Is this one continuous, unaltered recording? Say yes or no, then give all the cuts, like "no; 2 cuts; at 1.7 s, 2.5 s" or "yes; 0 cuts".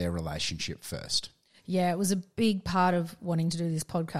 yes; 0 cuts